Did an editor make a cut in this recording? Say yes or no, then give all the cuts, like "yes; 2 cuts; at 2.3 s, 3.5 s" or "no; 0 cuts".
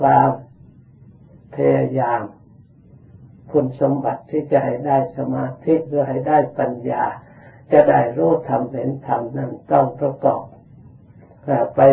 no; 0 cuts